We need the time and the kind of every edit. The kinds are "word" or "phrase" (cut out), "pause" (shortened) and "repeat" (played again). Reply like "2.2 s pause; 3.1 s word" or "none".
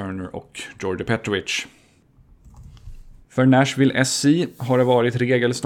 3.2 s pause